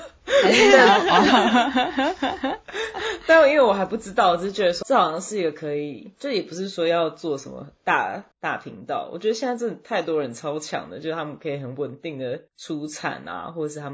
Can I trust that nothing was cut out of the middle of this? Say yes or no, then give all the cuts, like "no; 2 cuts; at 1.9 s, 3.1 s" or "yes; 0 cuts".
no; 3 cuts; at 4.8 s, 8.3 s, 12.5 s